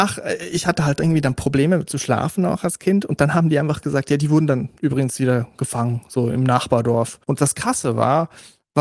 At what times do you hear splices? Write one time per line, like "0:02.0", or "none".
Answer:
0:07.2